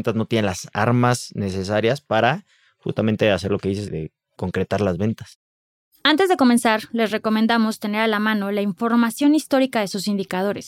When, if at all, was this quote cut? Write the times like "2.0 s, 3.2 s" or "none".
none

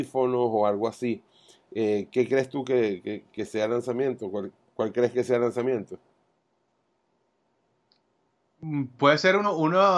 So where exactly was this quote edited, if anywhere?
none

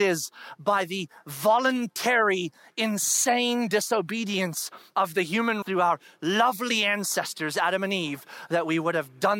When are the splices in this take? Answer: 5.6 s

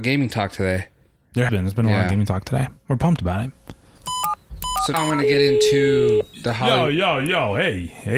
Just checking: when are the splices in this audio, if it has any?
1.5 s, 4.9 s

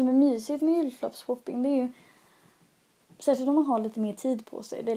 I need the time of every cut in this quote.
none

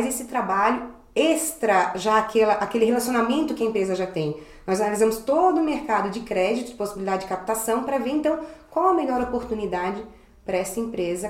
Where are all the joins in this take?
none

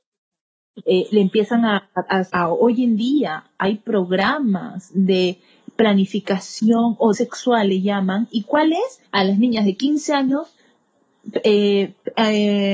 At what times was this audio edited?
2.3 s, 7.1 s, 9.1 s

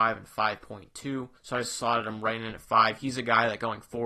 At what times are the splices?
1.4 s

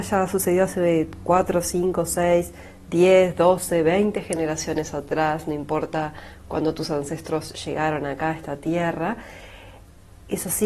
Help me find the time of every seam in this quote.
none

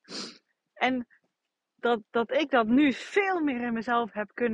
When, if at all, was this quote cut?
none

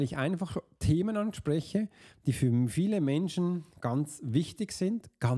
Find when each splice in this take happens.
none

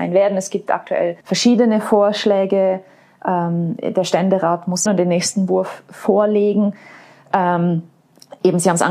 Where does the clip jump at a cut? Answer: 1.2 s, 4.9 s

